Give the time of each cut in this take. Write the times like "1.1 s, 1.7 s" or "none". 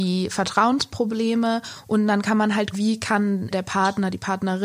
2.7 s, 3.5 s

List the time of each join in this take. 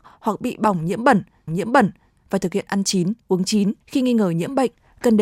1.5 s, 3.8 s

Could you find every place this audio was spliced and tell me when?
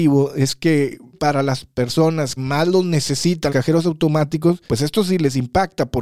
1.1 s, 2.4 s, 3.5 s, 4.7 s

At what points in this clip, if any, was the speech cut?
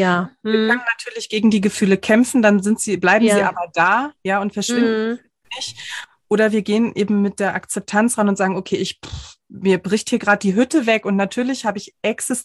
none

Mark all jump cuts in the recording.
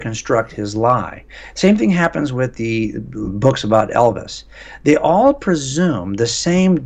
3.2 s

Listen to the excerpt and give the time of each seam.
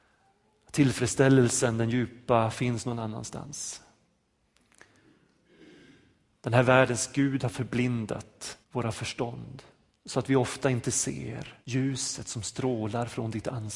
8.6 s, 9.9 s, 11.6 s

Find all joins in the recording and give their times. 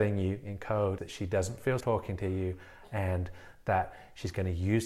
1.0 s, 1.8 s

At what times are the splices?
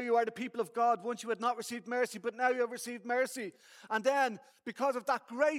none

